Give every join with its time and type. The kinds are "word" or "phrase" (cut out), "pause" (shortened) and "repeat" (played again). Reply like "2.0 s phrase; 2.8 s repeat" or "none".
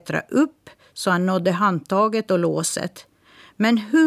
none